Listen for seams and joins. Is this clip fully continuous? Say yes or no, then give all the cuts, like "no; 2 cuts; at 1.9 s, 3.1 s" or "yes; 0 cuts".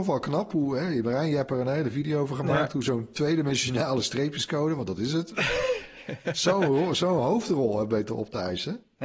yes; 0 cuts